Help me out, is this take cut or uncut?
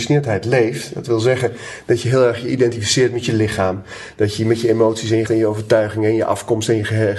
cut